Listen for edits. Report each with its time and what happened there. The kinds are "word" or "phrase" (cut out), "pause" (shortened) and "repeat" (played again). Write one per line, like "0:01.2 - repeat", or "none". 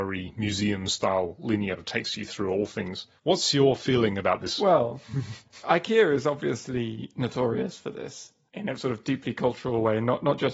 0:01.8 - phrase
0:03.2 - pause
0:08.8 - word